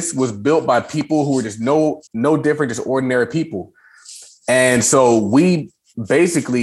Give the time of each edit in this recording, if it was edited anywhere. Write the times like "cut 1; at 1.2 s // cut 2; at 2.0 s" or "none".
cut 1; at 2.1 s